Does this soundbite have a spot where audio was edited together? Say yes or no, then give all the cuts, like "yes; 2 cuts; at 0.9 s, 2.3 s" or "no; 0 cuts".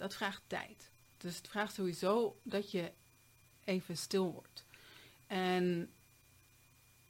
no; 0 cuts